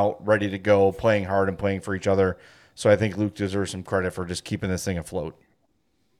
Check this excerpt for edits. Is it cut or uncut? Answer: uncut